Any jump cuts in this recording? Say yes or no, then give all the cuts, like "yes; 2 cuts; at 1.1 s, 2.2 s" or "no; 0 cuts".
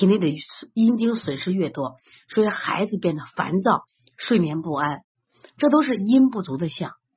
no; 0 cuts